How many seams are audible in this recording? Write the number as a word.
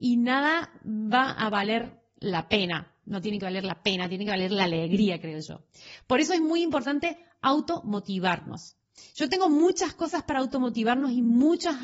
zero